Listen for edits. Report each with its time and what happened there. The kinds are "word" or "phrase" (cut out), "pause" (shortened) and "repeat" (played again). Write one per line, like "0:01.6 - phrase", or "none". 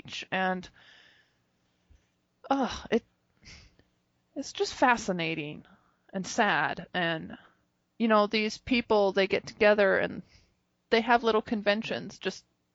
none